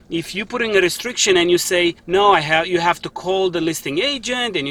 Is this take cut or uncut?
cut